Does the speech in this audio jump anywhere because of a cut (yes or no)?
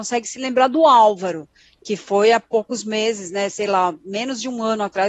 no